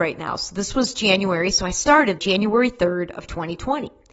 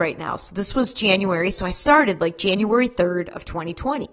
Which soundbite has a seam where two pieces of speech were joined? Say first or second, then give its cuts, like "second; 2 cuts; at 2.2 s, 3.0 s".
first; 1 cut; at 2.2 s